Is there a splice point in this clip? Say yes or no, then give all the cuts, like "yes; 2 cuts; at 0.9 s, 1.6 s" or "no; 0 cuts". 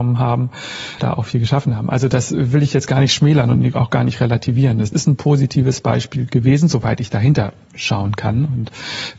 yes; 2 cuts; at 1.0 s, 4.9 s